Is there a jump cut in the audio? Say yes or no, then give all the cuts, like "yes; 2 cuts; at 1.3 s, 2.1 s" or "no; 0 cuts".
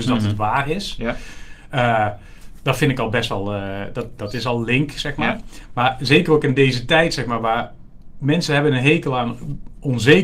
no; 0 cuts